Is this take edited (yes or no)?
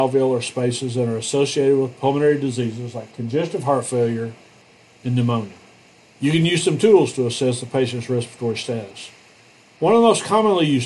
no